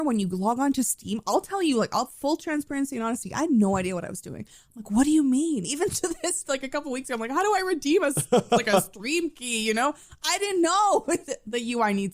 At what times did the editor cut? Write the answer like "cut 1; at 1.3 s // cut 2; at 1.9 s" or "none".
none

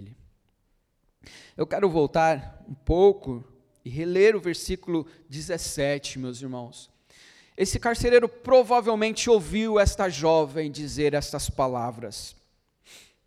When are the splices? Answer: none

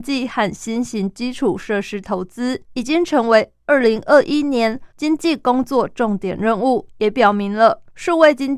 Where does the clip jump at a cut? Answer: cut 1; at 2.6 s // cut 2; at 4.9 s // cut 3; at 6.9 s

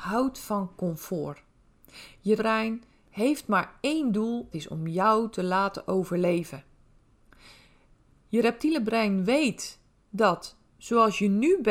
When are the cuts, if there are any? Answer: cut 1; at 2.4 s // cut 2; at 4.5 s // cut 3; at 10.7 s

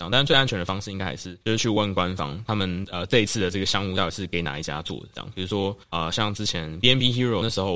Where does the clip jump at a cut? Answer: cut 1; at 1.4 s // cut 2; at 5.8 s

